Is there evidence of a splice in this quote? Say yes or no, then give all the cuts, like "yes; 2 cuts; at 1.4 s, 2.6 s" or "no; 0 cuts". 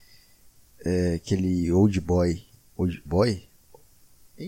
yes; 1 cut; at 3.1 s